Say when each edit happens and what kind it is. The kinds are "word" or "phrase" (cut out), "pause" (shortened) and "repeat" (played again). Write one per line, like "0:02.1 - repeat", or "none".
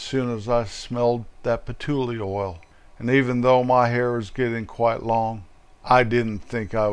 none

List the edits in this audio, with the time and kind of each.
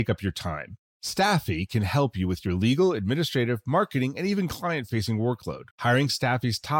0:05.7 - pause

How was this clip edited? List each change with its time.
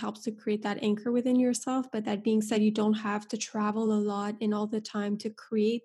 none

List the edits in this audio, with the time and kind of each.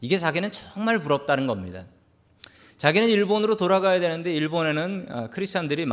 none

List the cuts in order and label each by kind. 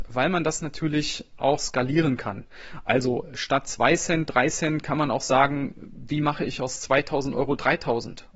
none

